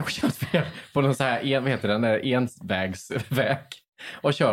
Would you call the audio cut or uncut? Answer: uncut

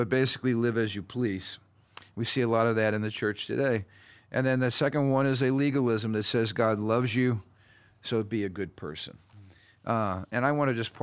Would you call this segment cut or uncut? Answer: uncut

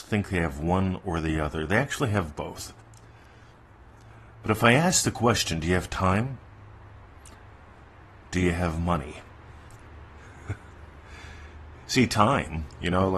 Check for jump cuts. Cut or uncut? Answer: uncut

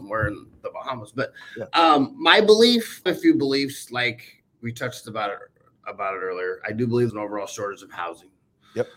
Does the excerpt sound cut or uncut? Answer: cut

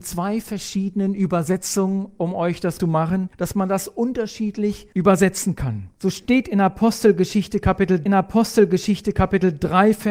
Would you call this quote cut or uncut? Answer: cut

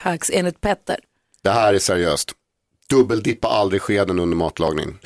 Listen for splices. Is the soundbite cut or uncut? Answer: uncut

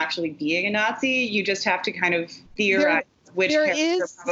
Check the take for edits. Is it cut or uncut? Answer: cut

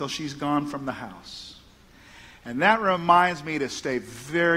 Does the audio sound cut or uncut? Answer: uncut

